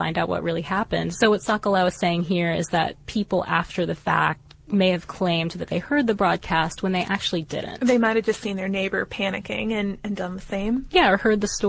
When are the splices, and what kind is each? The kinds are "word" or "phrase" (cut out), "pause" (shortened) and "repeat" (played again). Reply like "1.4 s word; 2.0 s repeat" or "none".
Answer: none